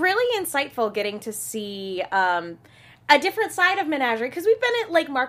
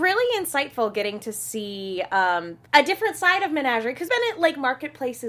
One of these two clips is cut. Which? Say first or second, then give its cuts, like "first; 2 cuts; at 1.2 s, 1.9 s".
second; 2 cuts; at 2.6 s, 4.1 s